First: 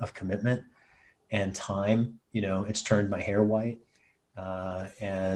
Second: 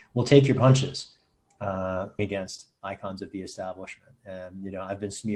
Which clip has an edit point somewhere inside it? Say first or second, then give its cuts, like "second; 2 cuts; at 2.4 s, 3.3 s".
second; 1 cut; at 2.2 s